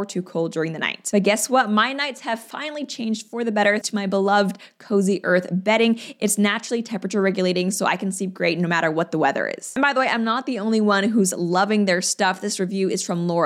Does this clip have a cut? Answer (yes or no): yes